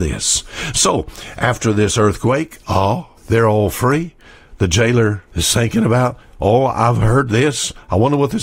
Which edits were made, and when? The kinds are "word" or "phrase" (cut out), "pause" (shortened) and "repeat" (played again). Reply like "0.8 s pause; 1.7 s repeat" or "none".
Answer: 3.2 s pause; 5.3 s pause